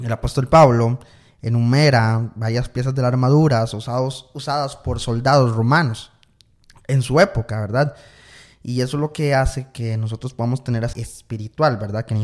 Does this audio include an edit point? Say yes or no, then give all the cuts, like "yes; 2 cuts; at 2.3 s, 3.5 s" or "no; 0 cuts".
yes; 1 cut; at 10.9 s